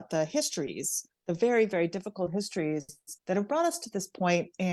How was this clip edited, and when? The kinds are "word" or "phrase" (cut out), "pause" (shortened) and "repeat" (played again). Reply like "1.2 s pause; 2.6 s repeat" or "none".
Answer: 3.2 s pause

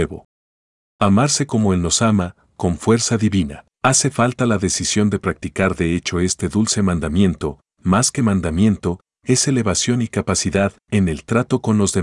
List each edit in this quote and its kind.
3.7 s pause

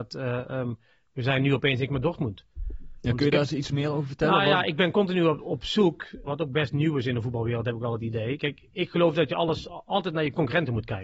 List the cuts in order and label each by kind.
1.9 s word; 6.3 s word

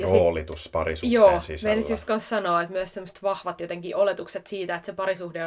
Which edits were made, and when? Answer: none

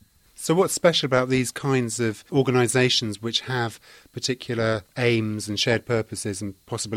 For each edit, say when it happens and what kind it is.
none

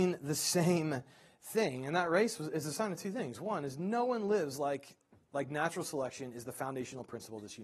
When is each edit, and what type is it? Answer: none

